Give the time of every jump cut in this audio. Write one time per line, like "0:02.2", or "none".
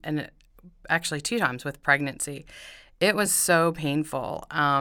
none